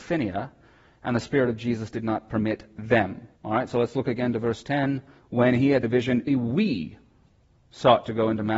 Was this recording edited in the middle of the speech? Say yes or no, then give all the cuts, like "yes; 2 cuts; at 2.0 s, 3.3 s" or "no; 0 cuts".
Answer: yes; 4 cuts; at 3.4 s, 5.2 s, 5.8 s, 6.3 s